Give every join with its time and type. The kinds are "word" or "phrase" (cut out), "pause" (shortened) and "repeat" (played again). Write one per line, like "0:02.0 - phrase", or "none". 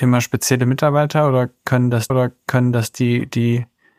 0:02.1 - repeat